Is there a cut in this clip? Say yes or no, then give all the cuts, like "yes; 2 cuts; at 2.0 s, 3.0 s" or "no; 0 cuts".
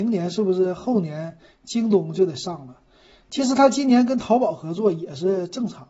no; 0 cuts